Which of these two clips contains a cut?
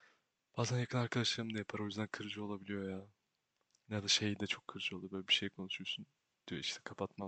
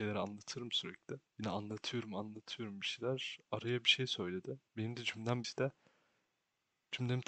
second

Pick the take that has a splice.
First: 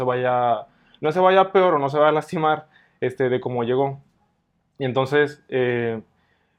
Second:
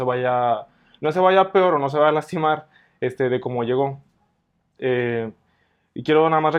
second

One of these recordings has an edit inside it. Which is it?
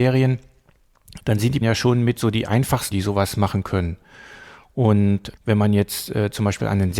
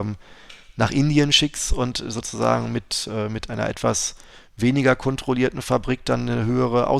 first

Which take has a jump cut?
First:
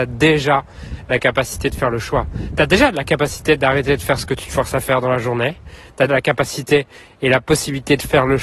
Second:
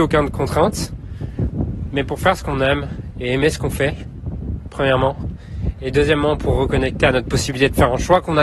first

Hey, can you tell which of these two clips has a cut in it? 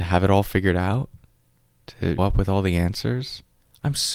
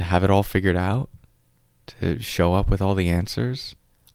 first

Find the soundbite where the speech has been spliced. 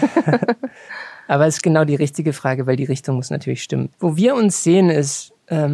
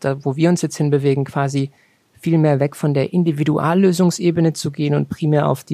first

